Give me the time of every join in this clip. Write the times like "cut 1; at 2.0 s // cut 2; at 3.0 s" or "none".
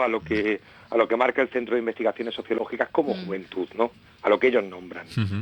none

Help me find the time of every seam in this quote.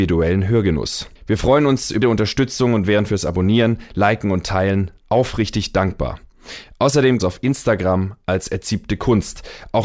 cut 1; at 1.2 s // cut 2; at 2.0 s // cut 3; at 7.2 s

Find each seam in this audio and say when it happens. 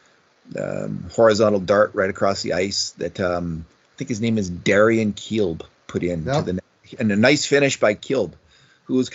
none

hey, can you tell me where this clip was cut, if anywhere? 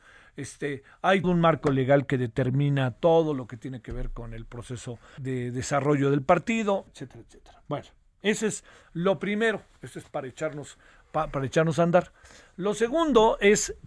cut 1; at 1.2 s // cut 2; at 5.2 s // cut 3; at 6.9 s

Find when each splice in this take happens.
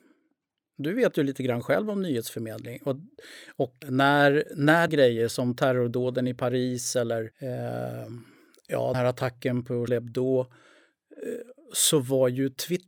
cut 1; at 3.8 s // cut 2; at 4.9 s // cut 3; at 7.3 s // cut 4; at 8.9 s // cut 5; at 9.9 s

